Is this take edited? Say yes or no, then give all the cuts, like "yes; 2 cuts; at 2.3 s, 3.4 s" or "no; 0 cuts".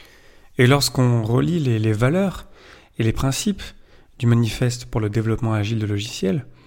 no; 0 cuts